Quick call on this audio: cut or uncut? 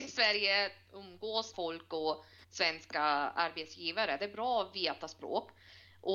cut